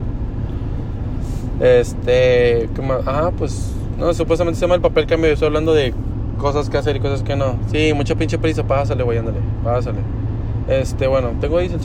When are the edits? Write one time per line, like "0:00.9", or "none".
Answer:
0:04.1